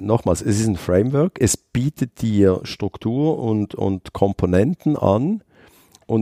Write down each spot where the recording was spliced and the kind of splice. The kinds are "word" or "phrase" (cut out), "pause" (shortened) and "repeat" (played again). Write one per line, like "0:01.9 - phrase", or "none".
none